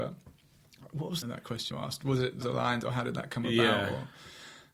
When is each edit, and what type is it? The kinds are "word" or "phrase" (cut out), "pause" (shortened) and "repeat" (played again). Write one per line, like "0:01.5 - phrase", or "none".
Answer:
0:01.2 - phrase
0:01.7 - word
0:02.4 - word